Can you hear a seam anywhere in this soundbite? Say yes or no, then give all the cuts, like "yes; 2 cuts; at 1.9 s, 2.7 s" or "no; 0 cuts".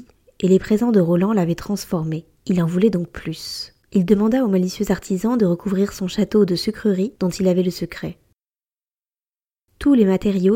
yes; 2 cuts; at 2.4 s, 3.8 s